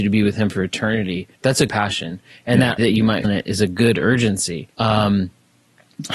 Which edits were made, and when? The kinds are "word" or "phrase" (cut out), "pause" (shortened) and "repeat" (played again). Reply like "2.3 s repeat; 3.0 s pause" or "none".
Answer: 1.4 s pause; 1.7 s word; 2.8 s word; 3.2 s word; 4.7 s pause